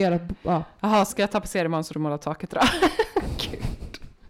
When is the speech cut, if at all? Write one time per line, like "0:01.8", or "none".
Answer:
0:01.1
0:01.9